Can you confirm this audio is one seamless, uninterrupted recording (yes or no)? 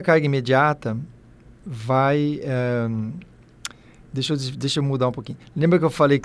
yes